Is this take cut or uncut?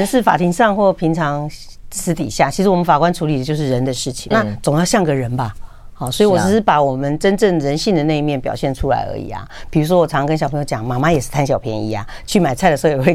cut